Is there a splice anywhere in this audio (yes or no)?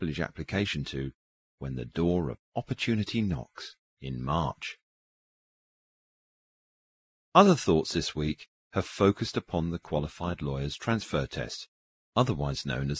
no